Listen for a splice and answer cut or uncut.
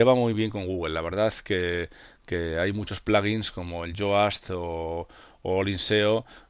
uncut